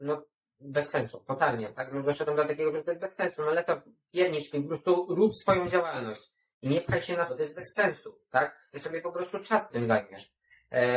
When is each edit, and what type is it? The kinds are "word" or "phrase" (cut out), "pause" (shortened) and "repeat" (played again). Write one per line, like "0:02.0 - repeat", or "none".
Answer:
0:02.7 - word
0:04.5 - word
0:07.3 - word
0:09.7 - word